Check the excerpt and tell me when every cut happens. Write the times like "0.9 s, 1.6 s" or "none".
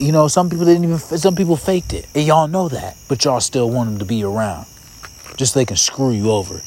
2.1 s, 3.0 s